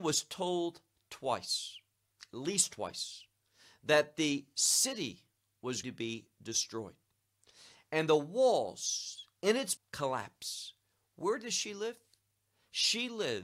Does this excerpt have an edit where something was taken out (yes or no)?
yes